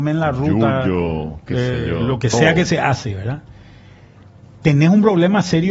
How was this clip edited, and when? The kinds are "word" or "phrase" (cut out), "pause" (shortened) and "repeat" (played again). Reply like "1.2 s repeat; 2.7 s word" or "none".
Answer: none